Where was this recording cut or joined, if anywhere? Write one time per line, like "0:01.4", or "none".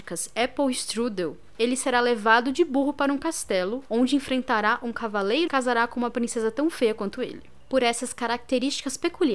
0:05.5